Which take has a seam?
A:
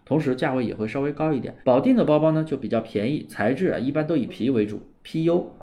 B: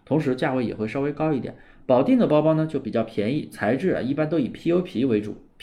A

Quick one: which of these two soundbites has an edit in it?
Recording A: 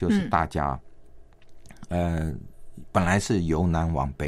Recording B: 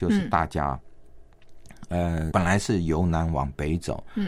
B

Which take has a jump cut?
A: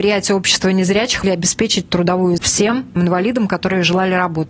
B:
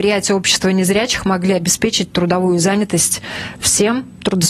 A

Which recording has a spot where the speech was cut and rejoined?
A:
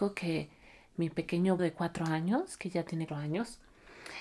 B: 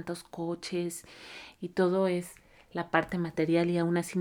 A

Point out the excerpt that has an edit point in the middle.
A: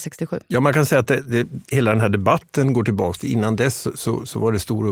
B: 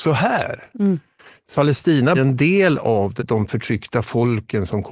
B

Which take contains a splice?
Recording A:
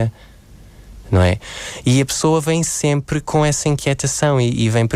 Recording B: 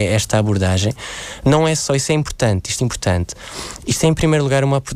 B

